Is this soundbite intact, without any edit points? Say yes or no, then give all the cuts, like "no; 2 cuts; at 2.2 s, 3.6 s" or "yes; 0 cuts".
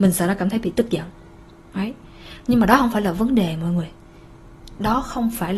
yes; 0 cuts